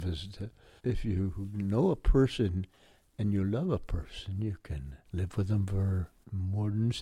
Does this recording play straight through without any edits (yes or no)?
yes